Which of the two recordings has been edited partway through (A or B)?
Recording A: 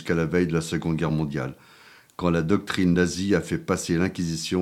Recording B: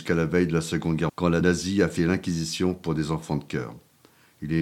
B